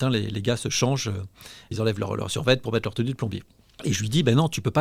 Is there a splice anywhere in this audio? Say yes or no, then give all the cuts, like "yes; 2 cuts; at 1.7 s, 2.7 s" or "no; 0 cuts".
no; 0 cuts